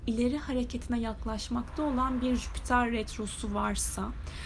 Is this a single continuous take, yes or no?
yes